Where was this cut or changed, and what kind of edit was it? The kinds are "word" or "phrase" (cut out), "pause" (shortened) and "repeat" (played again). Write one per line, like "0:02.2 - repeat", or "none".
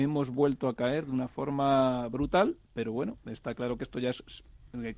none